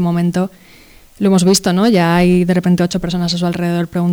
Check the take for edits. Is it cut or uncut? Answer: uncut